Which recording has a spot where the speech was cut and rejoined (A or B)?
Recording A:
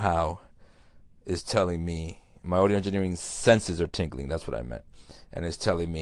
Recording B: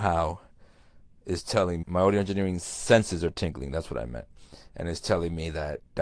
B